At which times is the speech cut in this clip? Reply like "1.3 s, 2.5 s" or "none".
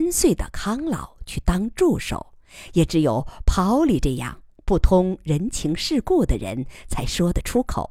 none

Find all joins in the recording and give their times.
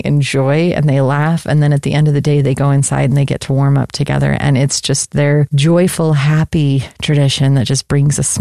none

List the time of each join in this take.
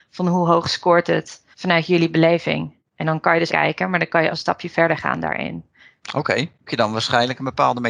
1.5 s, 3.5 s, 4.3 s, 5.8 s, 6.7 s

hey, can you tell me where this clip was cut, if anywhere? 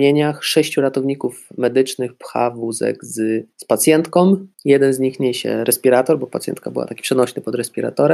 3.5 s, 4.5 s

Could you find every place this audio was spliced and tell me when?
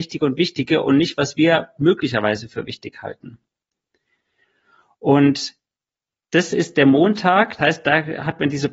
7.6 s

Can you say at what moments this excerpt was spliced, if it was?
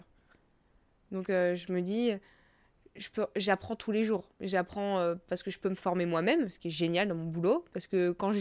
4.3 s

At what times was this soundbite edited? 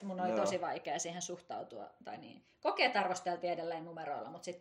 none

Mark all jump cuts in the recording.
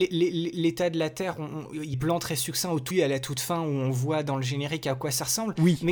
1.9 s, 2.9 s

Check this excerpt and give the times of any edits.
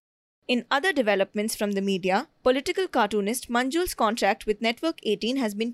2.3 s

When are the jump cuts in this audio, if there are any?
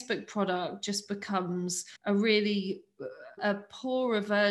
2.0 s, 3.4 s

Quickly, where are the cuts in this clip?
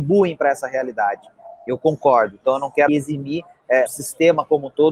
2.9 s, 3.9 s

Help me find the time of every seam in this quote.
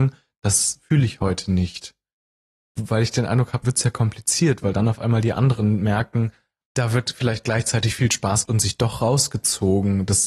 3.6 s, 6.6 s, 8.5 s

